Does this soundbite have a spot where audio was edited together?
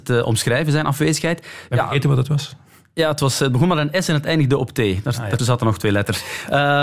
yes; 1 cut; at 5.4 s

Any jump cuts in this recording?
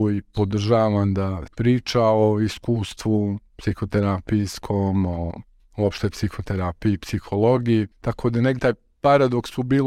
yes; 4 cuts; at 1.5 s, 5.6 s, 7.9 s, 8.6 s

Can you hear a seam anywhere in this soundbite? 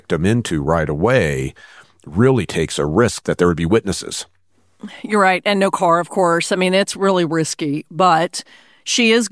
no; 0 cuts

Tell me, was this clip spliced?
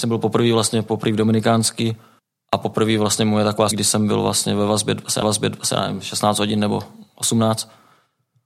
yes; 3 cuts; at 2.2 s, 3.7 s, 5.2 s

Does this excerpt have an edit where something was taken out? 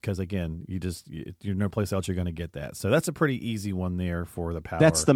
no; 0 cuts

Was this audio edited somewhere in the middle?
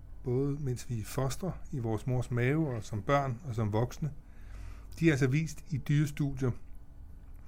no; 0 cuts

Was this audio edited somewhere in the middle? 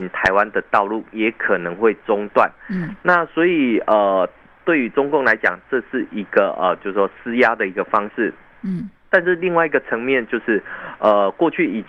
no; 0 cuts

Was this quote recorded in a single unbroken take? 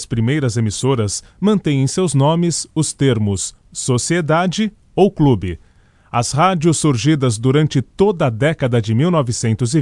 yes; 0 cuts

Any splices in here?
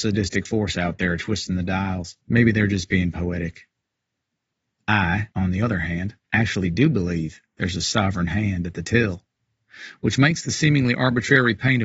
yes; 3 cuts; at 2.2 s, 5.3 s, 6.2 s

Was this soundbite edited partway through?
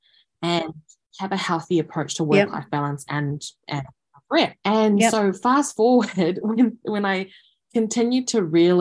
no; 0 cuts

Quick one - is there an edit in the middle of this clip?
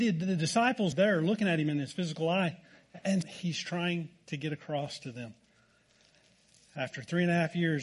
yes; 2 cuts; at 0.9 s, 3.2 s

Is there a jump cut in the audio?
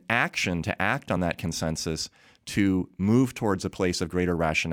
no; 0 cuts

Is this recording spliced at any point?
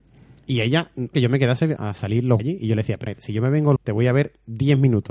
yes; 5 cuts; at 1.1 s, 1.8 s, 2.4 s, 3.1 s, 3.8 s

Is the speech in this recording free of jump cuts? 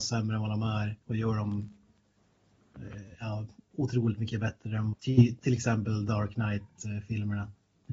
no; 2 cuts; at 1.0 s, 4.9 s

